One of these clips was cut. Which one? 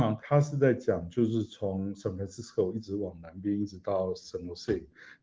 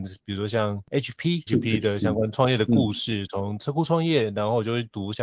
second; 1 cut; at 1.5 s

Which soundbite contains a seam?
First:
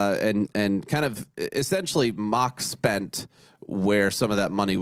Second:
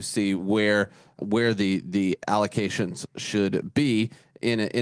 second; 1 cut; at 1.2 s

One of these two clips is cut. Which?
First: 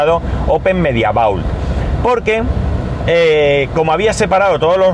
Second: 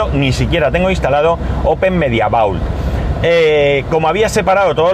second; 1 cut; at 3.1 s

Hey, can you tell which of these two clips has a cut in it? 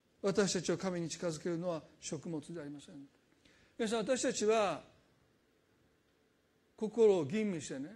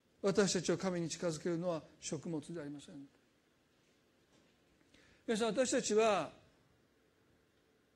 first; 1 cut; at 3.3 s

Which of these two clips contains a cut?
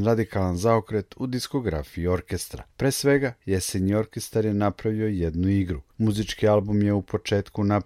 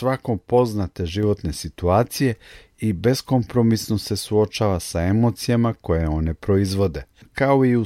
first; 2 cuts; at 2.7 s, 5.9 s

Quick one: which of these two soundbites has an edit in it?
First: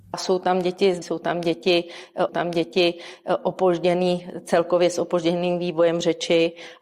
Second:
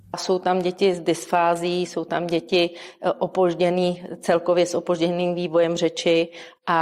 first; 2 cuts; at 1.0 s, 2.3 s

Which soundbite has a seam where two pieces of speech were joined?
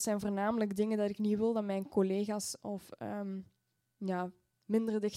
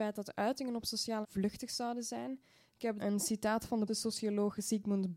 second; 3 cuts; at 1.2 s, 3.0 s, 3.9 s

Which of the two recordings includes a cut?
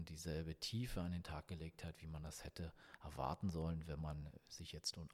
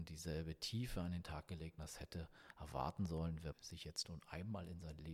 second; 2 cuts; at 1.8 s, 3.5 s

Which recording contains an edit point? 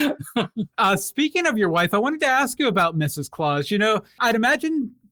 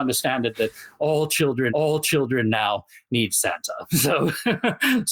second; 1 cut; at 1.7 s

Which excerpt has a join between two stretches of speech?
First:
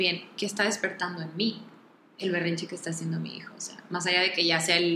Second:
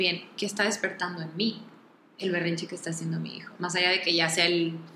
second; 1 cut; at 3.6 s

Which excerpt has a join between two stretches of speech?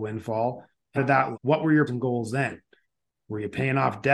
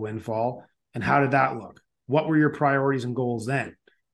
first; 3 cuts; at 1.0 s, 1.3 s, 1.9 s

